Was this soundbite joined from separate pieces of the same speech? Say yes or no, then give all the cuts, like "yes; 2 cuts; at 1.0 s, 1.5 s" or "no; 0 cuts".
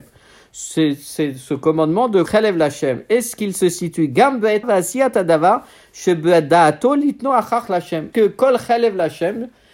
yes; 4 cuts; at 2.3 s, 4.6 s, 7.7 s, 8.1 s